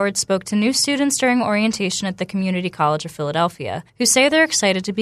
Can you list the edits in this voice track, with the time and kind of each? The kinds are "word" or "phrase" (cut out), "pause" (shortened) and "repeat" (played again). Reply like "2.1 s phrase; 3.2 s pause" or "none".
3.9 s pause